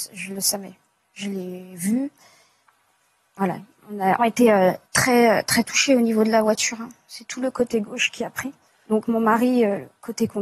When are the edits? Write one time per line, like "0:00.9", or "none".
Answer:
0:04.2
0:04.8
0:08.7